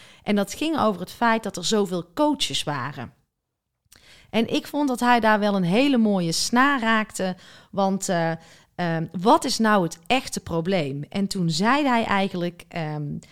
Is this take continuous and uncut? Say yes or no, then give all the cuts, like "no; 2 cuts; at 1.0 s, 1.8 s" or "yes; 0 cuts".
yes; 0 cuts